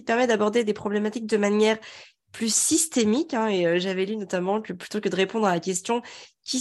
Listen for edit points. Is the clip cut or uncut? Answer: uncut